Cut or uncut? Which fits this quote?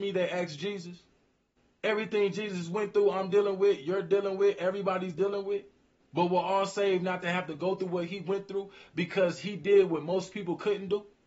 uncut